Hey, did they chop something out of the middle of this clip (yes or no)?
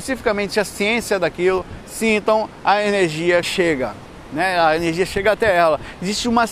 yes